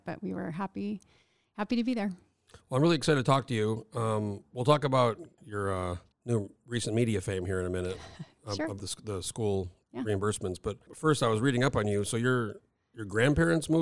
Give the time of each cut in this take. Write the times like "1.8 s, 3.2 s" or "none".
5.4 s, 6.1 s, 8.8 s, 10.9 s